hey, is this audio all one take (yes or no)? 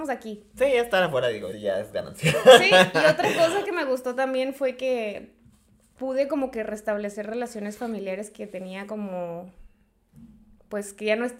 no